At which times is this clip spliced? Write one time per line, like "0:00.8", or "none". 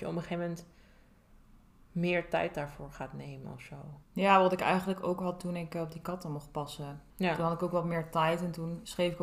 0:04.0
0:07.1